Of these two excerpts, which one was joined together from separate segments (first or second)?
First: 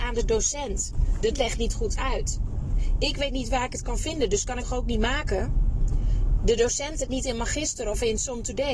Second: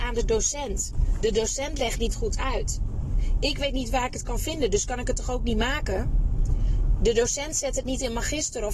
first